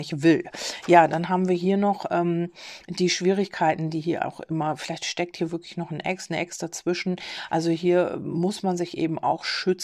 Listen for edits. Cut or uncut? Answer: uncut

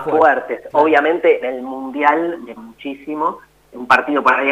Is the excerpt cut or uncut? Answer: cut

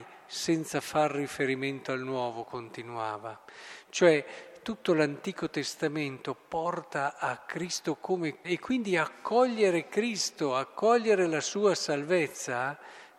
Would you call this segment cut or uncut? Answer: cut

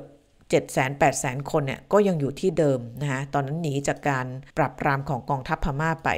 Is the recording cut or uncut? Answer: cut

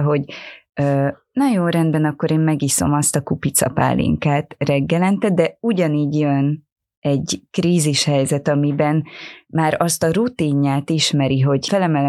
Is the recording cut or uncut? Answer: uncut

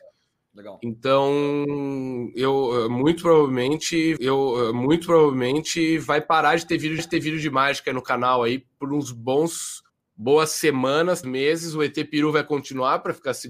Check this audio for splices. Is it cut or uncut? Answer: cut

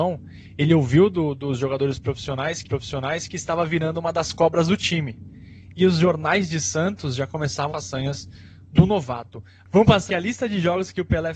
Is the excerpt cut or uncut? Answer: cut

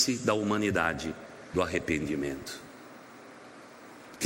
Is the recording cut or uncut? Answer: cut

